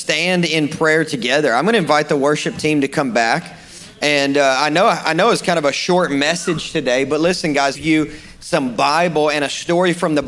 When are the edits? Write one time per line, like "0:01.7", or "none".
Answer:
0:07.7